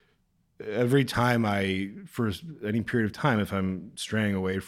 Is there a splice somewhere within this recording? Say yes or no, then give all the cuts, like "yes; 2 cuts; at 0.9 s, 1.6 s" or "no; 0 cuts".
no; 0 cuts